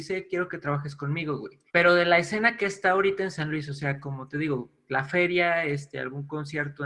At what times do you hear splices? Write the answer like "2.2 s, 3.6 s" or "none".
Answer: 1.7 s